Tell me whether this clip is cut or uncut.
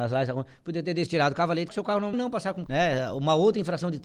cut